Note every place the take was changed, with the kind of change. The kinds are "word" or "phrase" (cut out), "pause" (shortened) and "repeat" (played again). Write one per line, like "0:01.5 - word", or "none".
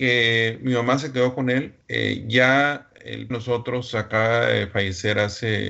0:01.8 - pause
0:03.3 - phrase